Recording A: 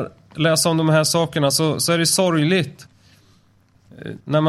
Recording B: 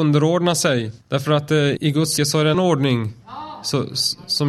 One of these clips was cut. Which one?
B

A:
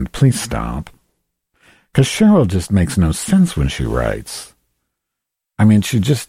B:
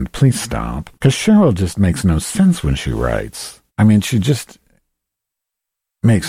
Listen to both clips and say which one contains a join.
B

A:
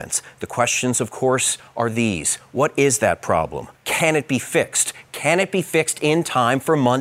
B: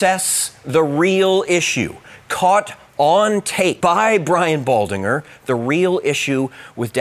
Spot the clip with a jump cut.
A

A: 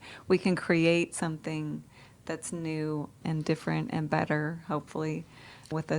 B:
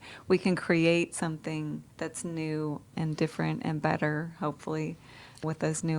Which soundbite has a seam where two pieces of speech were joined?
B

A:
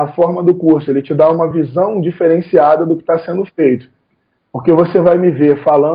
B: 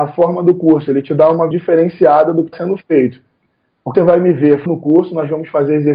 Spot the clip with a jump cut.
B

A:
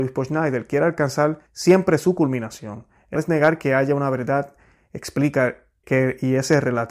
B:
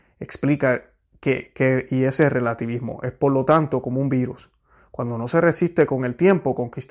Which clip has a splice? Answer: A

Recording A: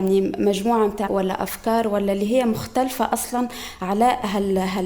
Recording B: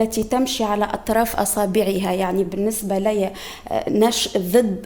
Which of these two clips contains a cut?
A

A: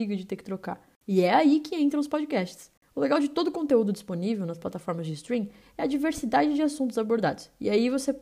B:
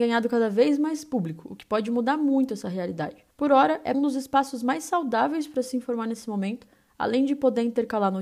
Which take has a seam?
B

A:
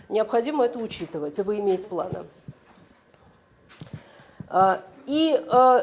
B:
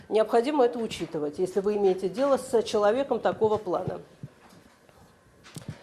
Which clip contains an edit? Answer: A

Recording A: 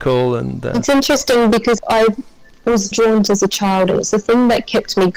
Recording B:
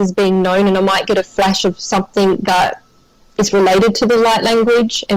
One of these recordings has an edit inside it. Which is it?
A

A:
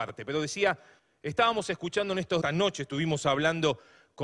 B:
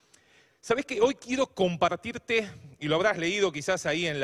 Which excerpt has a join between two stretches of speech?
A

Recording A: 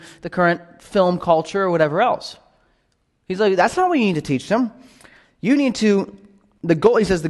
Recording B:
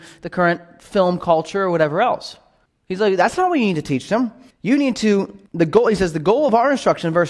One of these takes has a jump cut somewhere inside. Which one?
B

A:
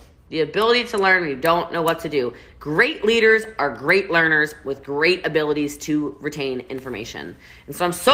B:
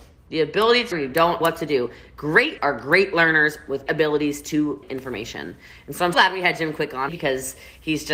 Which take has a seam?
B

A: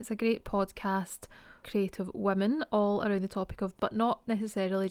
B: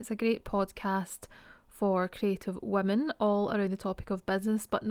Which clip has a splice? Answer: A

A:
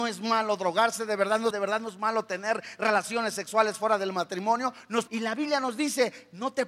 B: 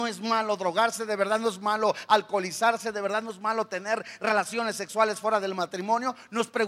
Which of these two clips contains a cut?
A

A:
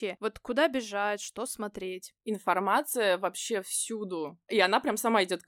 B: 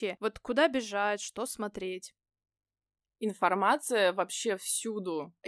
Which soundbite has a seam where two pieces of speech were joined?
A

